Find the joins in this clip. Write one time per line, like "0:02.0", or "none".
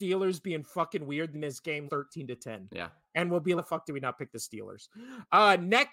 0:01.3
0:01.9
0:03.6